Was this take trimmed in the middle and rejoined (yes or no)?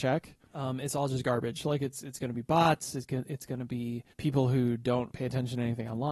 yes